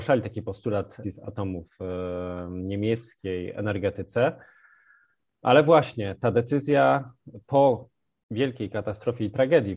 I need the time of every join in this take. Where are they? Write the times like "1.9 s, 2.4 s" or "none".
1.0 s